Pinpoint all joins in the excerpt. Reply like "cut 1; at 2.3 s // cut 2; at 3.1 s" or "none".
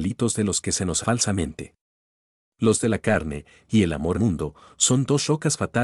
cut 1; at 1.0 s // cut 2; at 2.8 s // cut 3; at 4.1 s